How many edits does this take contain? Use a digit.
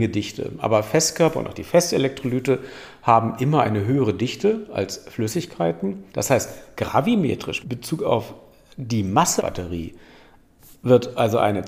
3